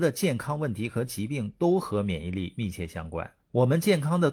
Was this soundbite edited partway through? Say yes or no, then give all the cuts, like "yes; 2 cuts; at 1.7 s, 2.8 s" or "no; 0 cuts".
yes; 1 cut; at 3.4 s